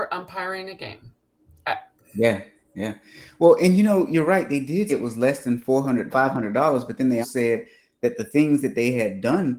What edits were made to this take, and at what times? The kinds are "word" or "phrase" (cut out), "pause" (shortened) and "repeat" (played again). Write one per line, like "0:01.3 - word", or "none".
0:04.9 - word
0:06.1 - word
0:07.2 - word